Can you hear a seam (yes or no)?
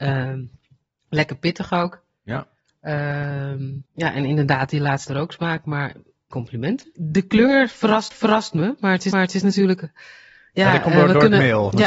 yes